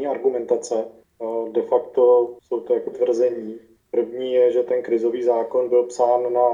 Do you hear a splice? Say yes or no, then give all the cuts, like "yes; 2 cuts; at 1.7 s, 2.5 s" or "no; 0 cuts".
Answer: yes; 2 cuts; at 2.4 s, 2.9 s